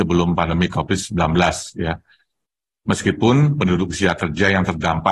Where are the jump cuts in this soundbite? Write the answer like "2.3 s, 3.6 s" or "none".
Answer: none